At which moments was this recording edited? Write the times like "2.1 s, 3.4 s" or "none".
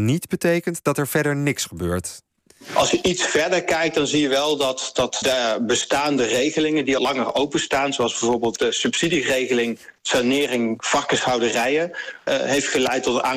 5.2 s, 7.0 s, 12.3 s